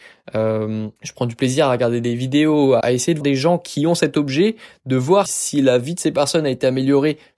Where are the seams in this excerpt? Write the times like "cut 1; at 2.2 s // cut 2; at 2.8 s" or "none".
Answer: cut 1; at 1.0 s // cut 2; at 2.8 s // cut 3; at 3.2 s // cut 4; at 5.3 s